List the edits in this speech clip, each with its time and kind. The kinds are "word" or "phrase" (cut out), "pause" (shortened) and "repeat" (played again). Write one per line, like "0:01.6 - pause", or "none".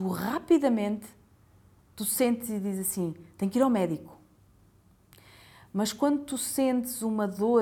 none